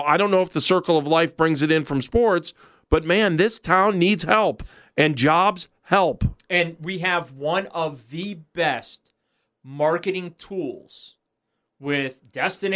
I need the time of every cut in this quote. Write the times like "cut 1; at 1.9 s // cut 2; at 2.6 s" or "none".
none